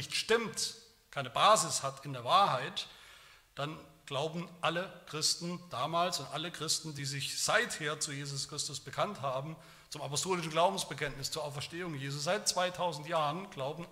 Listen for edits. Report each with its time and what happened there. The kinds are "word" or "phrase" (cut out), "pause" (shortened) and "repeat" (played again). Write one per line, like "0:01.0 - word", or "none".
none